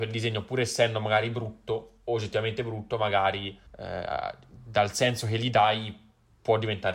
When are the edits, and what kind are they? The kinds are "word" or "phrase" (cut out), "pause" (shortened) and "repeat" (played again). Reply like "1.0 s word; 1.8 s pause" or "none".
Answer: 3.7 s pause

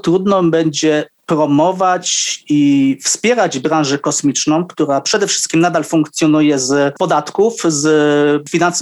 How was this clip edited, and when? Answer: none

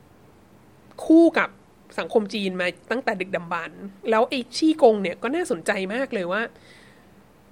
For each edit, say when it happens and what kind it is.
4.0 s pause

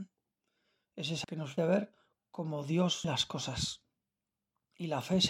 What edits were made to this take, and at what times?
1.2 s word; 1.6 s word; 3.0 s word

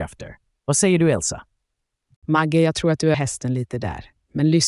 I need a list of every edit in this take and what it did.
3.1 s word

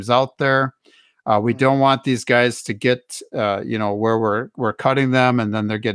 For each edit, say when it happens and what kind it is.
none

